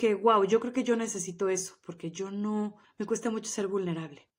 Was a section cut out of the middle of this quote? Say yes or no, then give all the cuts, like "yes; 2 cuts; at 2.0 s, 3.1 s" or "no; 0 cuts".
yes; 1 cut; at 2.8 s